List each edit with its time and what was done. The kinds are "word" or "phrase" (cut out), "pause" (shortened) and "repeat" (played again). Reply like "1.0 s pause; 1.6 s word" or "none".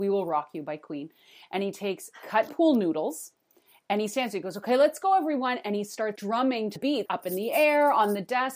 2.5 s word; 6.2 s word; 6.8 s word; 7.1 s word